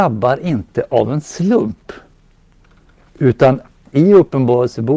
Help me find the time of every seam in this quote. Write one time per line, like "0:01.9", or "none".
0:03.9